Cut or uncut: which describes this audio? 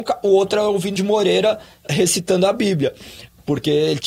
cut